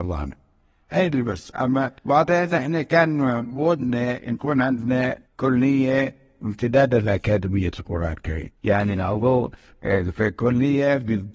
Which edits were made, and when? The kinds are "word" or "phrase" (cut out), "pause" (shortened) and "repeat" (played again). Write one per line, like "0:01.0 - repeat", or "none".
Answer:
0:02.0 - pause
0:05.3 - pause
0:08.6 - pause